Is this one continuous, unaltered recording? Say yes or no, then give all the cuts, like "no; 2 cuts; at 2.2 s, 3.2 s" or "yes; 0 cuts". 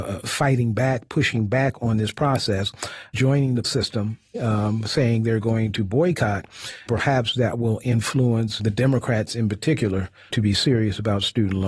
no; 6 cuts; at 3.1 s, 3.6 s, 4.3 s, 6.9 s, 8.6 s, 10.3 s